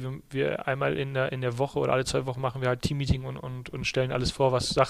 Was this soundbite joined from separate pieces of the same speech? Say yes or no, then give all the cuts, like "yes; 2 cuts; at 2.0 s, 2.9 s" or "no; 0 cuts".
yes; 1 cut; at 2.8 s